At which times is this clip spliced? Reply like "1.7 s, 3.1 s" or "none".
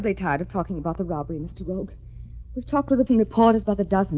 3.1 s